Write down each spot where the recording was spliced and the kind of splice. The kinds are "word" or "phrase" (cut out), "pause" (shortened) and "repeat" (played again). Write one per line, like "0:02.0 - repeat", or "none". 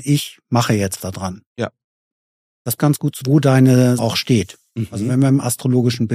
0:01.0 - word
0:02.8 - word
0:03.2 - word
0:04.0 - word